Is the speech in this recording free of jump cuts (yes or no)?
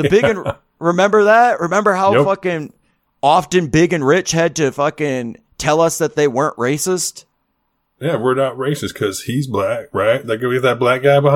yes